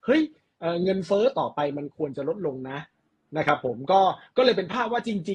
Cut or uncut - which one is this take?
uncut